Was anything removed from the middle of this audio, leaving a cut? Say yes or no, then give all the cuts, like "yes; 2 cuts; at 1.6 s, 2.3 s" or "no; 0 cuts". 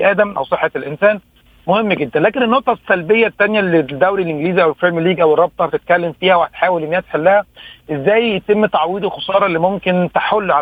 no; 0 cuts